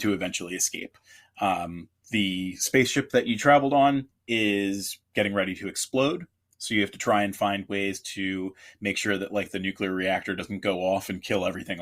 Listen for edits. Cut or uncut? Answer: uncut